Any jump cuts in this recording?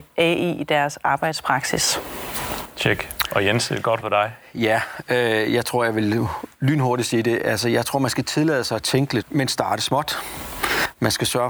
yes; 2 cuts; at 4.0 s, 9.2 s

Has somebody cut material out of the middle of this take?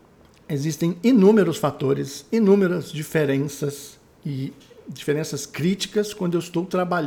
no; 0 cuts

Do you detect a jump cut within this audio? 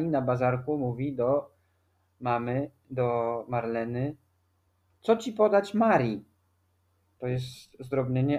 no; 0 cuts

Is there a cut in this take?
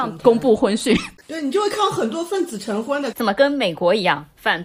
yes; 1 cut; at 3.1 s

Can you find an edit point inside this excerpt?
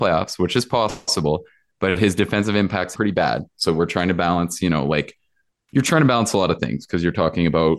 yes; 1 cut; at 2.9 s

